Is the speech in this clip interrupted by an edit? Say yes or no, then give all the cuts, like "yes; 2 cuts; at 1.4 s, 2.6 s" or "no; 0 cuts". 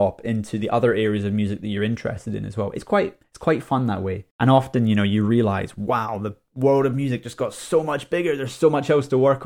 yes; 1 cut; at 4.3 s